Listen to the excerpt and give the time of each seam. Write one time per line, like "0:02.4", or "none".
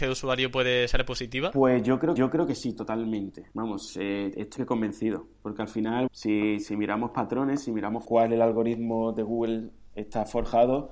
0:02.2
0:03.5
0:04.6
0:06.1
0:08.0